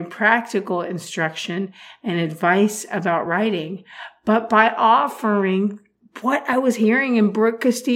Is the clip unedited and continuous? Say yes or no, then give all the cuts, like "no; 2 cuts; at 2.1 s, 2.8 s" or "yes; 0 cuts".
yes; 0 cuts